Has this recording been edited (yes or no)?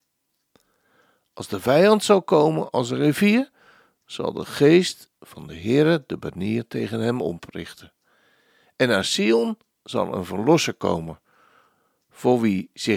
no